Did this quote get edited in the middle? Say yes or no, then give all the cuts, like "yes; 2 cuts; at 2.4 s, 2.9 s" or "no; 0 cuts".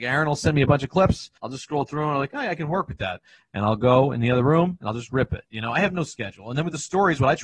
yes; 1 cut; at 1.4 s